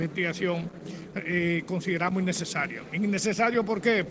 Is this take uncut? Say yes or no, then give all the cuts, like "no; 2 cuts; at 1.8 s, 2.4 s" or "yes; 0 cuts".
yes; 0 cuts